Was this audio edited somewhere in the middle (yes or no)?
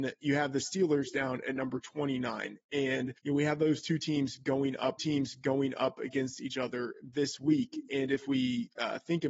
yes